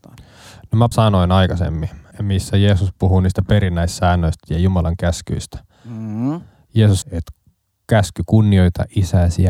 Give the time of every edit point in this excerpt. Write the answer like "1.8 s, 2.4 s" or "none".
0.9 s, 2.1 s, 7.0 s